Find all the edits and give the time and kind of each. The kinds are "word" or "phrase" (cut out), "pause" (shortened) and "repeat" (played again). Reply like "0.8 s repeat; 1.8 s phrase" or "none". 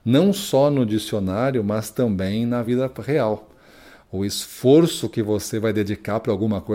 none